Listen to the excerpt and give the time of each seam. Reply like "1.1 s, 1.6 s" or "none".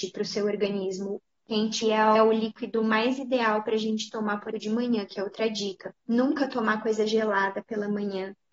1.8 s, 2.2 s, 4.5 s, 6.0 s

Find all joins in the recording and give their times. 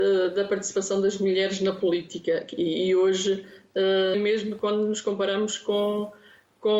4.1 s

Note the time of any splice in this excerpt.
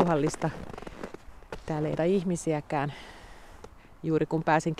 2.0 s

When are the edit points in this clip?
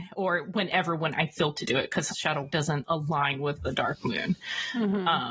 1.5 s, 2.1 s, 2.5 s, 3.6 s

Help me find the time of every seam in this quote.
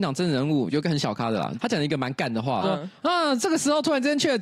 2.6 s

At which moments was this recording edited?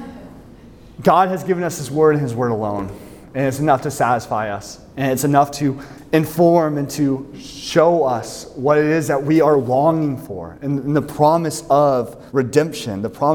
12.3 s

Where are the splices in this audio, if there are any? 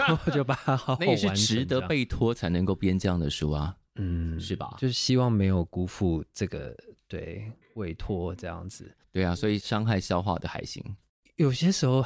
3.9 s

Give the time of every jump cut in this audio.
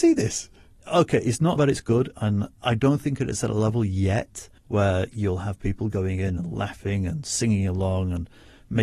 1.6 s, 4.6 s

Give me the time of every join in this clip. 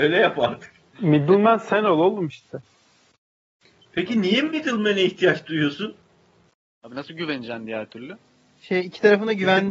none

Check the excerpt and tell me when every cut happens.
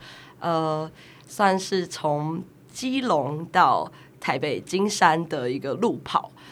none

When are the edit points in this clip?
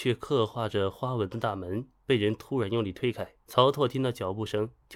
3.4 s

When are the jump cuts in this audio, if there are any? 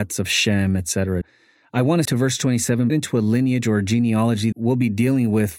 1.2 s, 2.0 s, 2.9 s, 4.5 s

